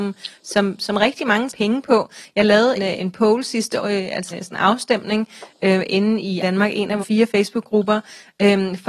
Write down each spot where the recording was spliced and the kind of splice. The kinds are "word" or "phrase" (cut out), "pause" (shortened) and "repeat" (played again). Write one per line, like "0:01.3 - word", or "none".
0:01.5 - word
0:02.8 - word
0:03.8 - word
0:04.3 - word
0:06.4 - word
0:07.0 - word